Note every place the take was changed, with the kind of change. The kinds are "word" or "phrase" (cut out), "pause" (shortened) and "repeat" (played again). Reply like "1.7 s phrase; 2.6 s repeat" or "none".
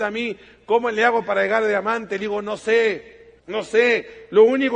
3.4 s pause